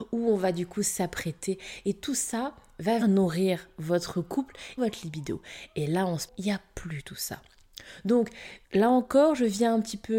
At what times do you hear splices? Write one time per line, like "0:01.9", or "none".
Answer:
0:03.0
0:04.8
0:06.3
0:08.6